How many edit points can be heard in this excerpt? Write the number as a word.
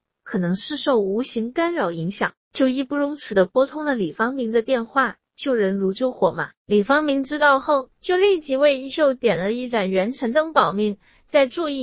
two